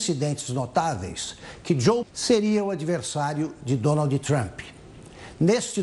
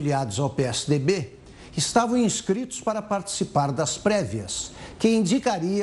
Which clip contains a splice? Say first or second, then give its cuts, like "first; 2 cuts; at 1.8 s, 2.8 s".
first; 1 cut; at 2.0 s